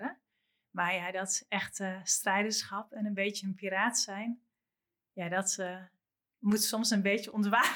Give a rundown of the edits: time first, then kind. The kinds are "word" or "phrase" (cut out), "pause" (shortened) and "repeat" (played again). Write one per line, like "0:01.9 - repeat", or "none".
none